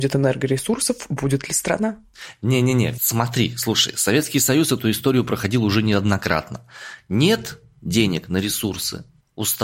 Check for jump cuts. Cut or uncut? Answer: uncut